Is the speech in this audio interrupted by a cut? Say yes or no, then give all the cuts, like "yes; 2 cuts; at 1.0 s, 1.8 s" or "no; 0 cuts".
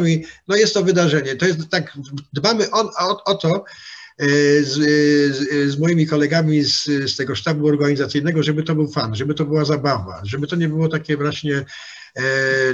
no; 0 cuts